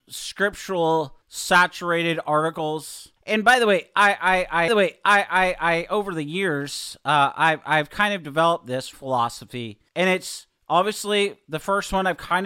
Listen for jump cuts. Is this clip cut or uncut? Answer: cut